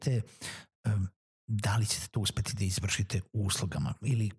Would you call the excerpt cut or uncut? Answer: uncut